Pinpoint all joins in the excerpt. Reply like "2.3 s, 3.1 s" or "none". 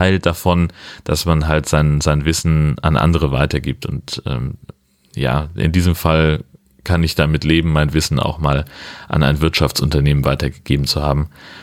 none